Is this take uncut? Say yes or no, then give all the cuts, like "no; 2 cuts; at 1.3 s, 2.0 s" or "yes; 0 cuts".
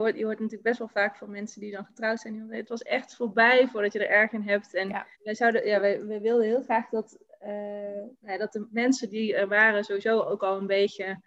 no; 1 cut; at 5.1 s